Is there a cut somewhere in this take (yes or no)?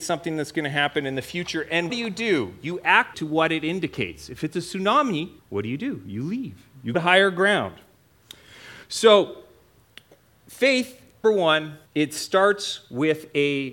yes